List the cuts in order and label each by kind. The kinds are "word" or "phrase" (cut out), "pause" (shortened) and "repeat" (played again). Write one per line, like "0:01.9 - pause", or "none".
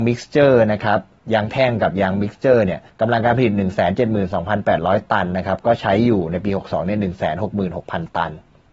0:02.9 - pause